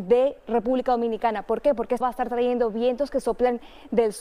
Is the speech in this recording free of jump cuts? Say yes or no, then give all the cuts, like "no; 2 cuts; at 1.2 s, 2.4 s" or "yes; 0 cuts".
no; 1 cut; at 2.0 s